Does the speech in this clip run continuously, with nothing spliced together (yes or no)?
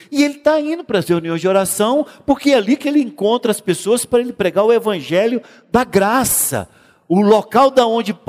yes